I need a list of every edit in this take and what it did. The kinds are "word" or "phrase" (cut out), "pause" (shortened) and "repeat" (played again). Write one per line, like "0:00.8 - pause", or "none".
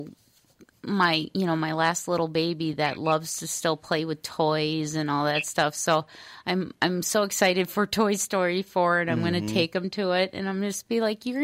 none